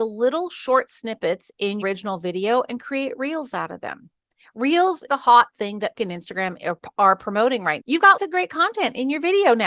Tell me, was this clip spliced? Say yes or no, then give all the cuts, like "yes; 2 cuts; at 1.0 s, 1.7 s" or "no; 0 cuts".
yes; 5 cuts; at 1.8 s, 5.1 s, 5.9 s, 7.8 s, 8.2 s